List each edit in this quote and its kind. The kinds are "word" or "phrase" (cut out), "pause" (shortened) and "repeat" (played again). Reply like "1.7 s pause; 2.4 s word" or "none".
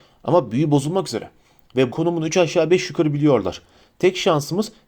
1.9 s word